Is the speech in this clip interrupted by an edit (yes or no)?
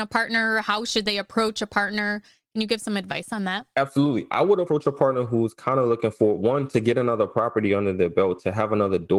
no